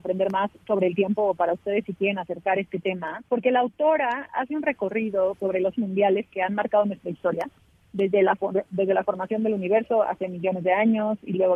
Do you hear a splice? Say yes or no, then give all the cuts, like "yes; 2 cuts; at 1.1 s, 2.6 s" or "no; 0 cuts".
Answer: yes; 3 cuts; at 3.3 s, 5.4 s, 5.7 s